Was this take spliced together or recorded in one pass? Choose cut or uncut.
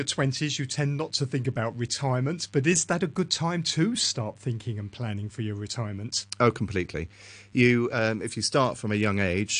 uncut